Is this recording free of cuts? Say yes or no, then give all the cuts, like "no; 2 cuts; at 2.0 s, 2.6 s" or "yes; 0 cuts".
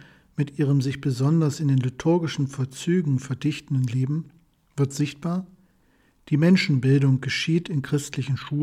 yes; 0 cuts